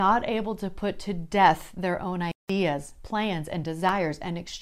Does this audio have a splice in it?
no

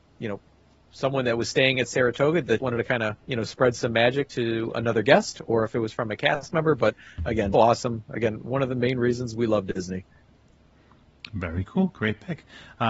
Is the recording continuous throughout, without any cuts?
no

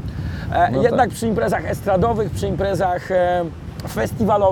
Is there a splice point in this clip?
no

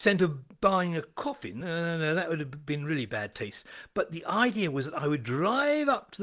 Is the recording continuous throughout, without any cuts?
yes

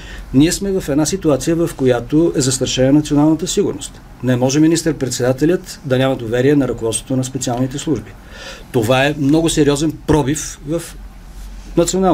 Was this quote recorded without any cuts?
yes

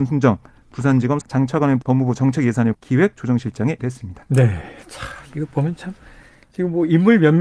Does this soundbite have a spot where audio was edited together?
yes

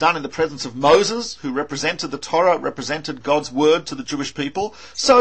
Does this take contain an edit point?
no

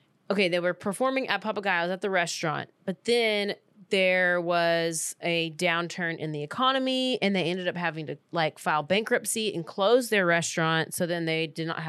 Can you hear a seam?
no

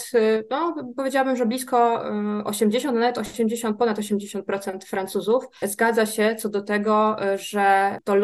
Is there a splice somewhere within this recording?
no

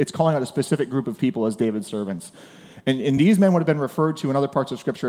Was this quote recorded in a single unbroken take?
yes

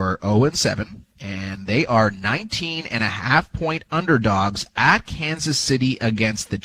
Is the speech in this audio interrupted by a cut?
yes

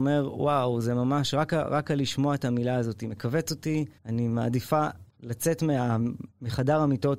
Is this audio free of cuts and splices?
no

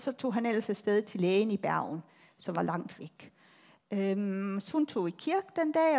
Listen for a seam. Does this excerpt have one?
no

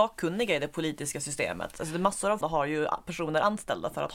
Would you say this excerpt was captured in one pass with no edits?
no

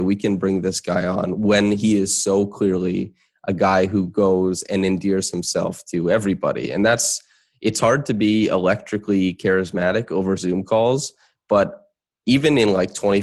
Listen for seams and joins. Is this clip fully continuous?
yes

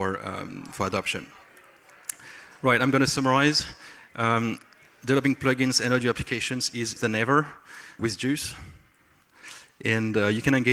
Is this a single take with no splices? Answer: no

